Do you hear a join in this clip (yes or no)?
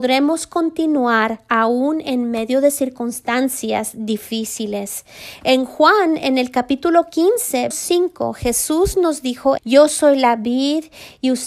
yes